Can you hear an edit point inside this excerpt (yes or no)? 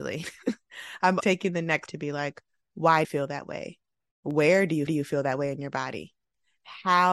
yes